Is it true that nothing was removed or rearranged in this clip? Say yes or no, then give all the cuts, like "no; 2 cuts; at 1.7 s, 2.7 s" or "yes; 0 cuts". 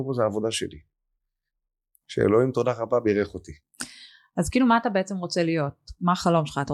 yes; 0 cuts